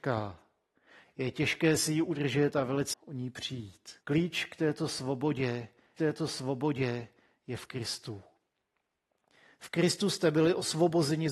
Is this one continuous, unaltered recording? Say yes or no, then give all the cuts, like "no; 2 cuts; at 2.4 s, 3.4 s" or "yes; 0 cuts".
no; 3 cuts; at 2.9 s, 4.0 s, 6.0 s